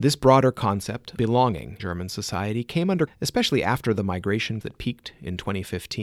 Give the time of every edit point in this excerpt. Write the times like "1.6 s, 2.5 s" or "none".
1.2 s, 1.8 s, 3.1 s, 4.6 s